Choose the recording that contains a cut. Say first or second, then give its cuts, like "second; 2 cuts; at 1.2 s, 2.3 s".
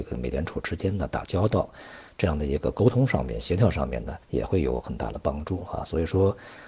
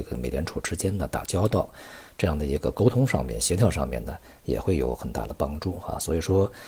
first; 1 cut; at 4.2 s